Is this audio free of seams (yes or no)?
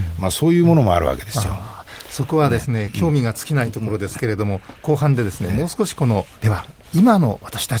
no